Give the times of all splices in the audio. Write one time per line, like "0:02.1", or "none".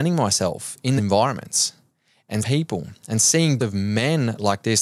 0:01.0
0:02.4
0:03.6